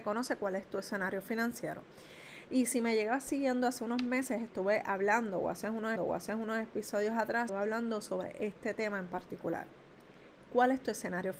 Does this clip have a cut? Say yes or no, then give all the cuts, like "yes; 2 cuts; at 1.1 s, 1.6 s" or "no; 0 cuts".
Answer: yes; 2 cuts; at 6.0 s, 7.5 s